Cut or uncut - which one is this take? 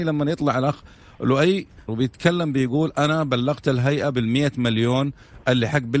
cut